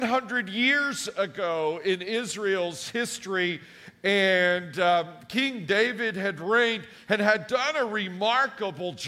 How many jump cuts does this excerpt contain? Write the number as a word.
zero